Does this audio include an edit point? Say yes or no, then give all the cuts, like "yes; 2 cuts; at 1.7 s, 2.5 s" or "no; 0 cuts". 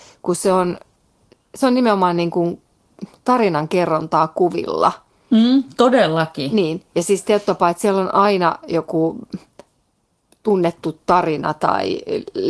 no; 0 cuts